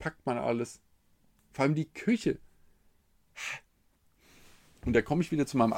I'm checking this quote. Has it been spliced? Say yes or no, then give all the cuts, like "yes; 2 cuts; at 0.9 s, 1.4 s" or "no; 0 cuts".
no; 0 cuts